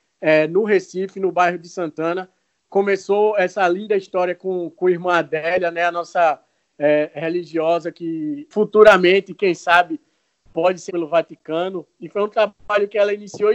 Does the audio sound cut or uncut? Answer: cut